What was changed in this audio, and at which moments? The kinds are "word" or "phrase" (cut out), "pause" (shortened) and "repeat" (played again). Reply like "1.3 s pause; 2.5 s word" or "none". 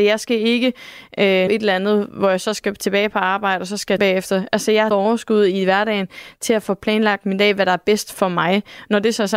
1.5 s word; 4.0 s word; 4.9 s word